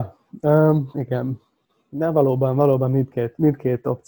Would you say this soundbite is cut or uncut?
uncut